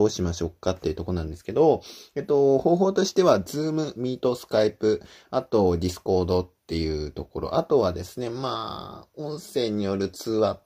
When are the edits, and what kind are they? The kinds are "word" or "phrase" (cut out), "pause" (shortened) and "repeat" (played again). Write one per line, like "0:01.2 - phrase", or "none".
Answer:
none